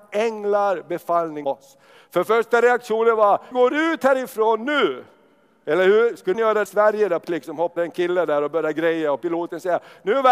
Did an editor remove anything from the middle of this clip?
yes; 6 cuts; at 1.4 s, 3.5 s, 6.3 s, 6.7 s, 7.2 s, 7.8 s

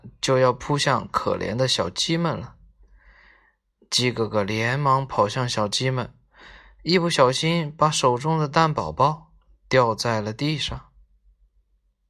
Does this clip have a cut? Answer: no; 0 cuts

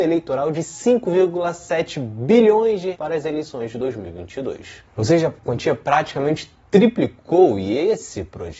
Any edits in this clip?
yes; 2 cuts; at 2.9 s, 4.8 s

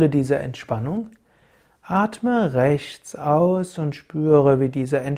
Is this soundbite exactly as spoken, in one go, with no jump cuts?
yes; 0 cuts

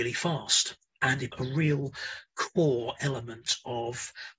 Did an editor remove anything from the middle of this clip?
yes; 1 cut; at 1.3 s

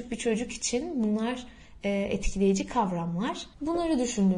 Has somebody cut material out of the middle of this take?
no; 0 cuts

